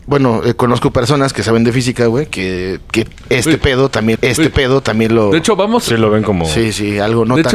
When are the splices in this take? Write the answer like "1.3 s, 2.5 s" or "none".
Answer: 4.2 s